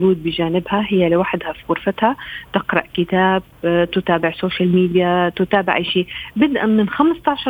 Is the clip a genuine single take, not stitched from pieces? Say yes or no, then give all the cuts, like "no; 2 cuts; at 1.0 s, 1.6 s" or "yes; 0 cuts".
yes; 0 cuts